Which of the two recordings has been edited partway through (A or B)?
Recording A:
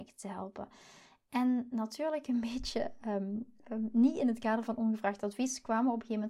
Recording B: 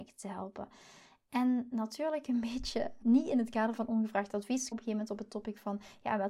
B